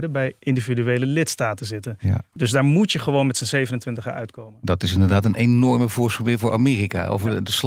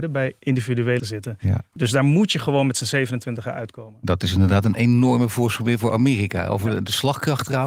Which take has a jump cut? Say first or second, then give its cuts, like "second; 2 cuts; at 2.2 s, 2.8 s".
second; 1 cut; at 1.0 s